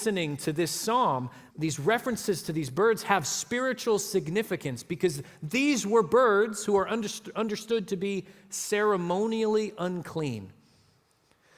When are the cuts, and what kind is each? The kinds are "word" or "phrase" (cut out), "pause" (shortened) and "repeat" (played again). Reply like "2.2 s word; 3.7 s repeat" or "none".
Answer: 1.5 s word